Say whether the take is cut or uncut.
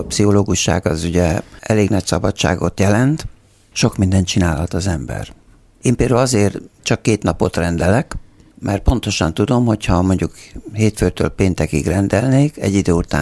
uncut